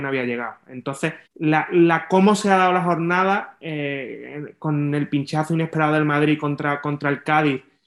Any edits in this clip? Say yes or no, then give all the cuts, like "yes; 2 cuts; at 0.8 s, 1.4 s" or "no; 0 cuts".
yes; 1 cut; at 1.2 s